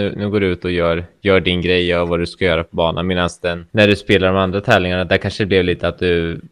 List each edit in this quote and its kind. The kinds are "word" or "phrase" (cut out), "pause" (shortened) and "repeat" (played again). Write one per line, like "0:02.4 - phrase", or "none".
0:03.7 - pause

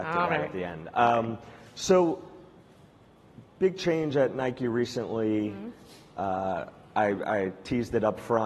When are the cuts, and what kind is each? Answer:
none

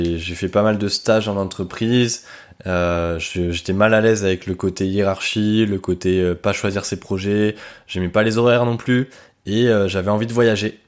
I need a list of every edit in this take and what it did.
none

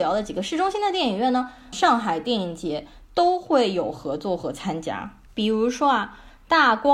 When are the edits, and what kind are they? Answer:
0:01.7 - word

